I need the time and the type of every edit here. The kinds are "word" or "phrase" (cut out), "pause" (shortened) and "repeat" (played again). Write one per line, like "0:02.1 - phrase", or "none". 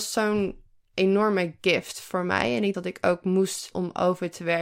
0:02.7 - word
0:03.7 - phrase